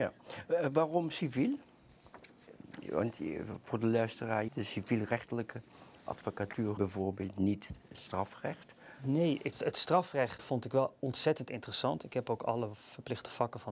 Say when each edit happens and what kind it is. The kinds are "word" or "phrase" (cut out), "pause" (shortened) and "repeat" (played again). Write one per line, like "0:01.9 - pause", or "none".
0:04.5 - word
0:06.8 - phrase
0:09.5 - word
0:10.4 - word